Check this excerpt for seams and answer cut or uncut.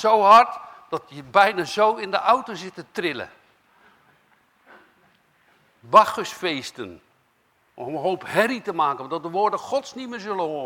uncut